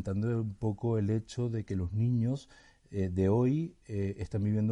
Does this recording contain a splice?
no; 0 cuts

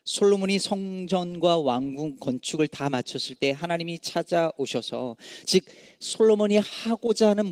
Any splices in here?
no; 0 cuts

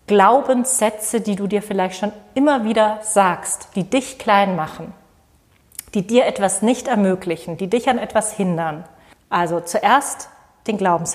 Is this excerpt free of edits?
no; 1 cut; at 9.1 s

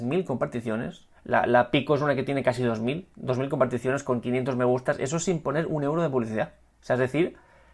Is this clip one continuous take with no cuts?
no; 1 cut; at 1.2 s

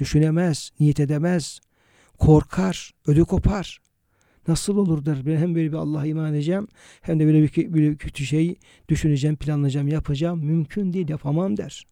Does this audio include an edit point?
no; 0 cuts

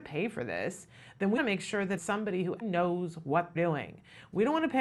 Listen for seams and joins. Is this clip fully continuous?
no; 4 cuts; at 1.4 s, 2.0 s, 2.6 s, 3.6 s

